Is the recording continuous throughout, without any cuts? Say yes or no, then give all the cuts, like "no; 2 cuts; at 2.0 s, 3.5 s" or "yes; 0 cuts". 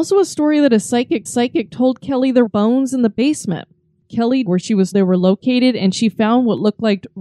no; 4 cuts; at 1.3 s, 2.5 s, 4.5 s, 4.9 s